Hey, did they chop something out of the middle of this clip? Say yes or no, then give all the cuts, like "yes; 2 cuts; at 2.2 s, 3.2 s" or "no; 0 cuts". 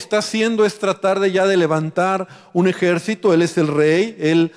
no; 0 cuts